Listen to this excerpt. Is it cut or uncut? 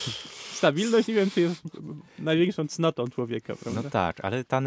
uncut